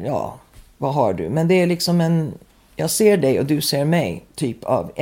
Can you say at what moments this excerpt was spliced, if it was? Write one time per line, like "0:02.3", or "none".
none